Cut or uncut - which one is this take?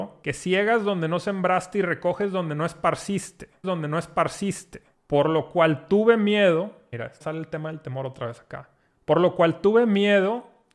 cut